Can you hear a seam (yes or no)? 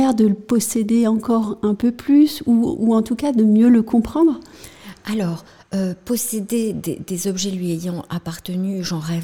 no